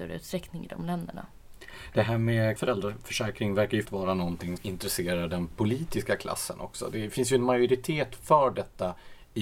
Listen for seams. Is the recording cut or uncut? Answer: cut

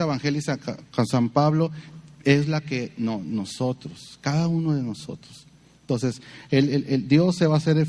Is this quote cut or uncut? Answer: uncut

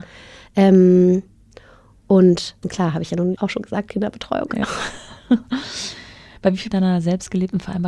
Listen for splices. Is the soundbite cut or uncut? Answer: cut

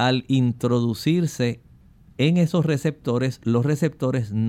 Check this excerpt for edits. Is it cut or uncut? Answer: uncut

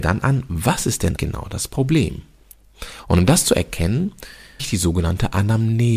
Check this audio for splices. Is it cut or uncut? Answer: cut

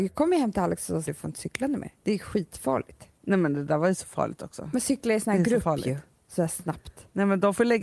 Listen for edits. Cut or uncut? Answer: cut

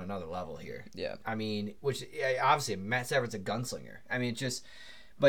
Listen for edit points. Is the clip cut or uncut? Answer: uncut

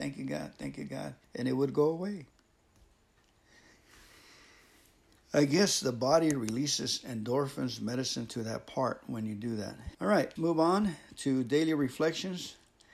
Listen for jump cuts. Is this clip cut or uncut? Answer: cut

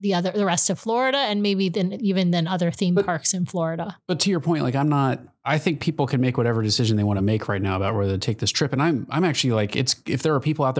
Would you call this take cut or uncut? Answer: uncut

